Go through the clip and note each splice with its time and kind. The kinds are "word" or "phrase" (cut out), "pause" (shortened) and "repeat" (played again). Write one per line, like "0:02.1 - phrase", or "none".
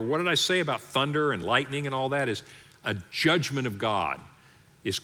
none

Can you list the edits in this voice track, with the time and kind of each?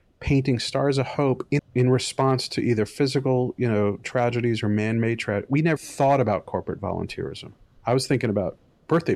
0:01.6 - phrase
0:05.8 - word

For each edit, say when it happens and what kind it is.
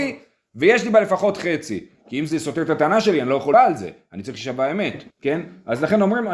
0:03.5 - word
0:05.1 - pause

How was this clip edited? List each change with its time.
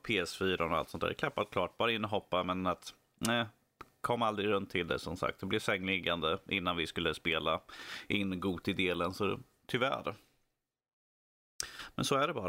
none

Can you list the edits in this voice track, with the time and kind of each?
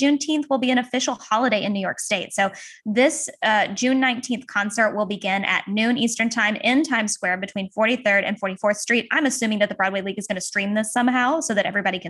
none

